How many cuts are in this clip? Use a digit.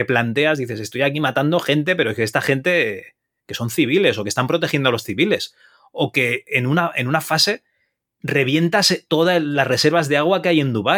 0